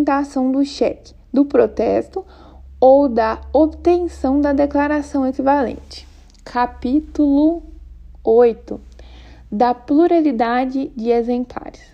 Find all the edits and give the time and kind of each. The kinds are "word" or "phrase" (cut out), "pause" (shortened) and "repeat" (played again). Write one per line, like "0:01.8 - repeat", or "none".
none